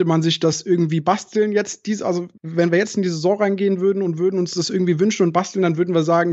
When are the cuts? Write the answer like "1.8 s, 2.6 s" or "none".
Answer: 2.4 s